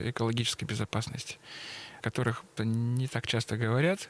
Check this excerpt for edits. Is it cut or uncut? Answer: cut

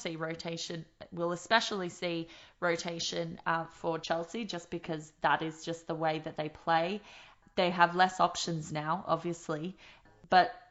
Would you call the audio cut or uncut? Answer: uncut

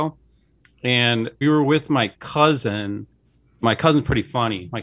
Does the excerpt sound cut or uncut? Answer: cut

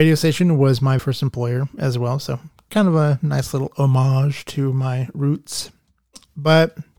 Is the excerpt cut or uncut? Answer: cut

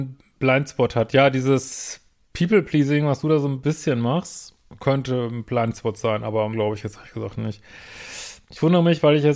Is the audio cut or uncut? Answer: cut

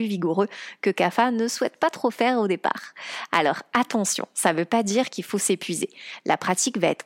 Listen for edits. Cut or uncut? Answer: uncut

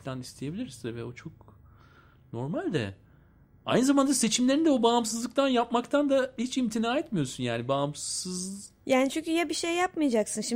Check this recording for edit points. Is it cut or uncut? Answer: uncut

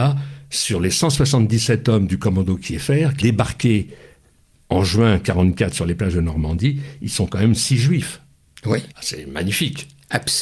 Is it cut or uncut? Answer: cut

